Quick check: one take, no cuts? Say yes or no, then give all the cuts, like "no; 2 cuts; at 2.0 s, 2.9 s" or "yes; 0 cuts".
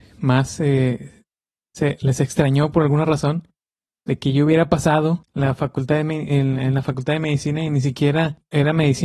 yes; 0 cuts